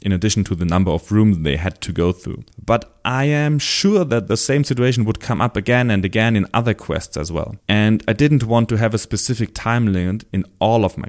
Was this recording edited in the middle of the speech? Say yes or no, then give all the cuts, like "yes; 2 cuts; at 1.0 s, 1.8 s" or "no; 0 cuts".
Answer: yes; 2 cuts; at 2.5 s, 7.6 s